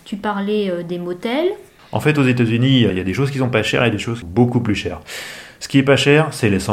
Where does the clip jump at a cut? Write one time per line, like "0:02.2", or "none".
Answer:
0:02.9
0:04.2